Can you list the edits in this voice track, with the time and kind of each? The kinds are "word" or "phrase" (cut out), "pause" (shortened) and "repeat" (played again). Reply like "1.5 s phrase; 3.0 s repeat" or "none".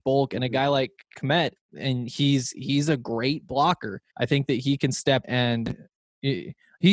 1.6 s pause; 4.1 s pause; 5.2 s word